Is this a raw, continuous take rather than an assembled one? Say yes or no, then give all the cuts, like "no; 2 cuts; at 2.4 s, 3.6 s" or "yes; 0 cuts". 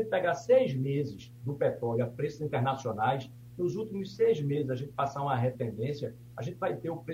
no; 1 cut; at 5.5 s